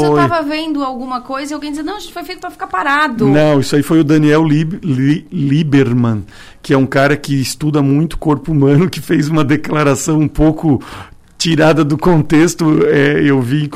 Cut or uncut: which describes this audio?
uncut